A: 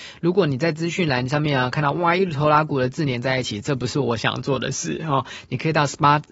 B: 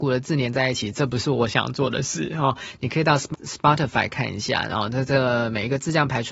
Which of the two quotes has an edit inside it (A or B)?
B